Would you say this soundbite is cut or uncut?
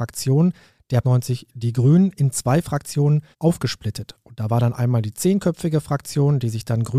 cut